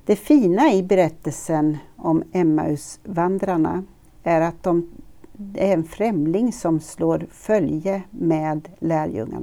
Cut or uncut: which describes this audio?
uncut